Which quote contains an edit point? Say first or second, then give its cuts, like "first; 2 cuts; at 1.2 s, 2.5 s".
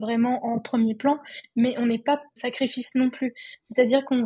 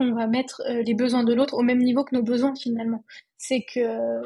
first; 1 cut; at 2.4 s